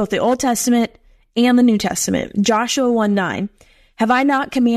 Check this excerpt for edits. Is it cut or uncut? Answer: uncut